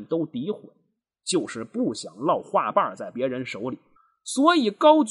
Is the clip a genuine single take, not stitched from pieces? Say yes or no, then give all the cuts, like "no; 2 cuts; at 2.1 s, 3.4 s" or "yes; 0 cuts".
no; 1 cut; at 4.0 s